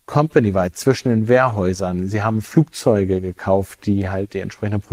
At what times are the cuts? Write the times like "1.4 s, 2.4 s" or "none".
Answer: none